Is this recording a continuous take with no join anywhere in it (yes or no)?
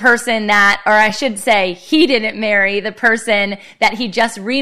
yes